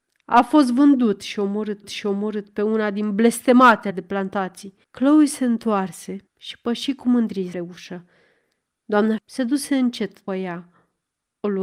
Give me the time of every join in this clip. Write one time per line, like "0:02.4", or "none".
0:01.8
0:03.9
0:04.8
0:06.3
0:07.5
0:09.2
0:10.3

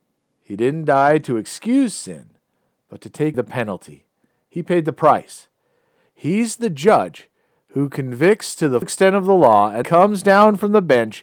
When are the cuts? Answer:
0:03.3
0:08.8
0:09.8

